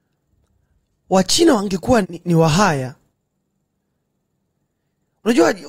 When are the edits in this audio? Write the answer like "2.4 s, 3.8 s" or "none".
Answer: 2.0 s